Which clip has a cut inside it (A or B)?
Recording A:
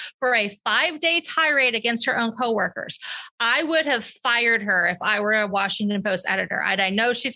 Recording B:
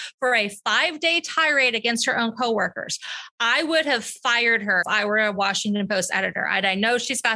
B